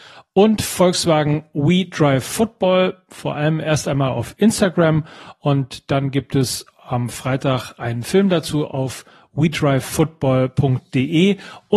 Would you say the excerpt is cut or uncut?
uncut